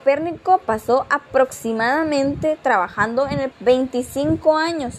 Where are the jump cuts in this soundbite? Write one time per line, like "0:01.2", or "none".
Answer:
0:03.5